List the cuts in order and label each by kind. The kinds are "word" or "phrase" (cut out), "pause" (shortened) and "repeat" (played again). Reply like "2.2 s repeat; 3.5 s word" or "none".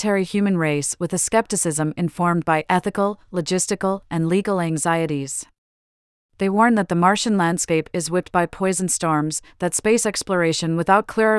none